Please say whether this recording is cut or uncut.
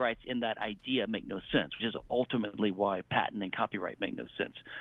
cut